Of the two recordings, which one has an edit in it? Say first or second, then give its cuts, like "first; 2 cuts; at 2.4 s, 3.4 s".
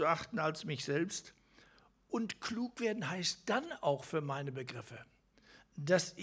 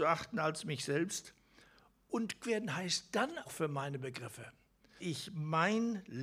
second; 3 cuts; at 2.4 s, 3.4 s, 5.0 s